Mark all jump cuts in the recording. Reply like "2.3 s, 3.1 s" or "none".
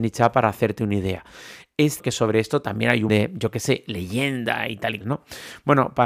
2.0 s, 3.1 s, 5.0 s

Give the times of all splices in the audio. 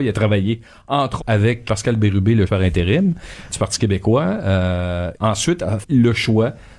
1.2 s, 1.7 s, 2.5 s, 3.5 s, 5.1 s, 5.8 s

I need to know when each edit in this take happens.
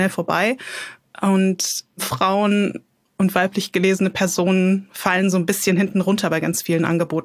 2.9 s

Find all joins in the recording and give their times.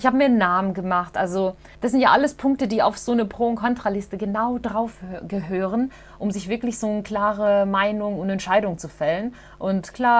1.7 s

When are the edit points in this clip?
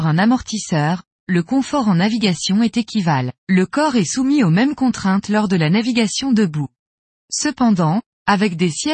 3.4 s, 7.1 s

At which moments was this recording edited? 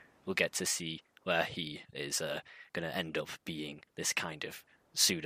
1.9 s, 2.7 s, 3.9 s

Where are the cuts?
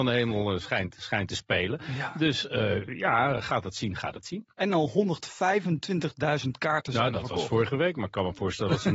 none

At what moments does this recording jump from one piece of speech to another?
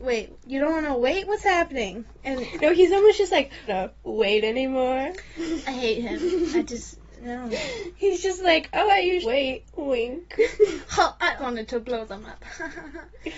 3.7 s, 9.2 s, 9.7 s, 11.4 s

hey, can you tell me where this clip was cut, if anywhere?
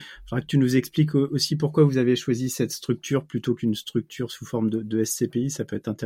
none

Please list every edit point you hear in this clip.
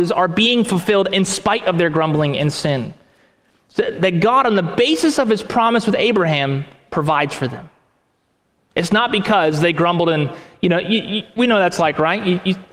none

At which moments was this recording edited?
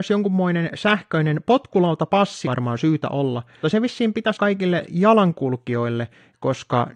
2.4 s, 3.6 s, 4.3 s

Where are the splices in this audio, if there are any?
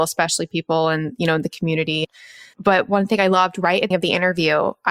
1.5 s, 3.9 s

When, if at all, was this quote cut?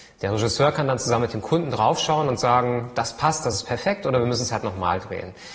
none

